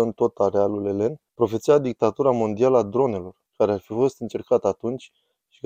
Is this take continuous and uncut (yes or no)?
no